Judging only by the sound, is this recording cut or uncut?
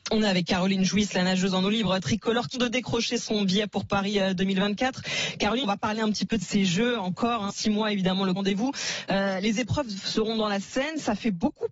cut